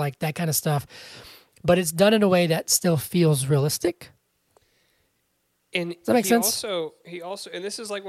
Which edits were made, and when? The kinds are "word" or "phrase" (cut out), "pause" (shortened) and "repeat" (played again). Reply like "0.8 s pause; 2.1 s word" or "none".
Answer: none